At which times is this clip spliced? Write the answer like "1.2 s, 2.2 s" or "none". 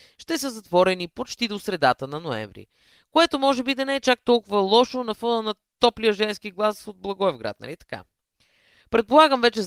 none